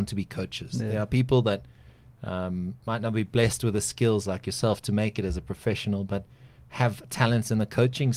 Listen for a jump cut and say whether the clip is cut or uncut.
uncut